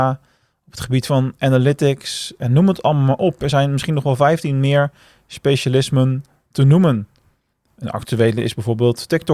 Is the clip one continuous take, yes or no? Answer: yes